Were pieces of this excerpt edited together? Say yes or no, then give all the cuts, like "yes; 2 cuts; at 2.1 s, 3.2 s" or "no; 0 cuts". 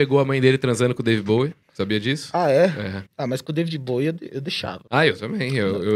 yes; 3 cuts; at 1.6 s, 3.1 s, 4.9 s